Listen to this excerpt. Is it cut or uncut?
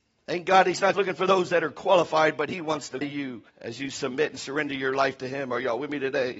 cut